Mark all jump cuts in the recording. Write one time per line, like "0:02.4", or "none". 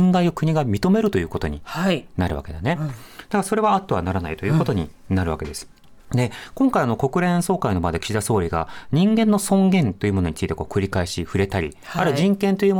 0:06.0